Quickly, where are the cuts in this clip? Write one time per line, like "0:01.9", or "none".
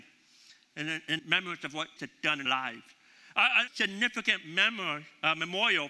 0:01.2
0:02.0
0:02.5
0:03.7